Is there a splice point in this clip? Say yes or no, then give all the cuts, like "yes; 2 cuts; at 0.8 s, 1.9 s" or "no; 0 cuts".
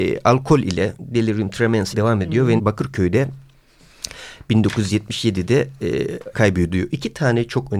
yes; 3 cuts; at 1.9 s, 2.6 s, 6.3 s